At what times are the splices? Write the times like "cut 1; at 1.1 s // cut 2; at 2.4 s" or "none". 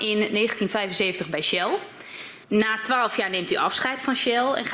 cut 1; at 2.4 s